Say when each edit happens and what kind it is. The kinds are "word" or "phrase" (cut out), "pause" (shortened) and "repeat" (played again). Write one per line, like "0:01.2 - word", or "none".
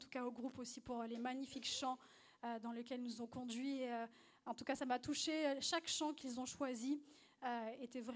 none